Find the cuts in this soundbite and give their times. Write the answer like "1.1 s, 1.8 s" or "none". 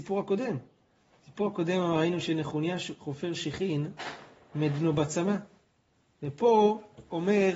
none